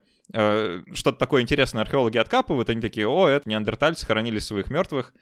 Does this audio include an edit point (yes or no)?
yes